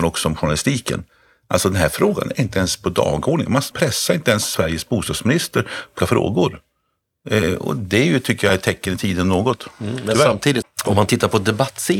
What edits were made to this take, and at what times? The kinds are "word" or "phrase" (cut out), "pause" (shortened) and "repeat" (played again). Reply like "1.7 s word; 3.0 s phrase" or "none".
3.7 s word; 6.0 s word; 10.6 s word